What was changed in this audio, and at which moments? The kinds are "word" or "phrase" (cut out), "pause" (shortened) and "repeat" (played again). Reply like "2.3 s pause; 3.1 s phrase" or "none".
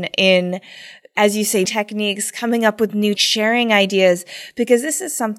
1.6 s word; 3.1 s word